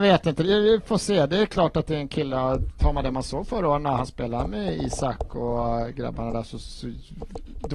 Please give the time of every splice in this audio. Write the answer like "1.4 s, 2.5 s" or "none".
none